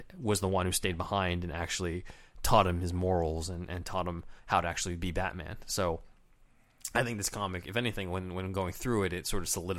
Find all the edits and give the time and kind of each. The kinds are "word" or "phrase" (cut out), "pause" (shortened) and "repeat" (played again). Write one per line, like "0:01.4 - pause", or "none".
0:04.4 - pause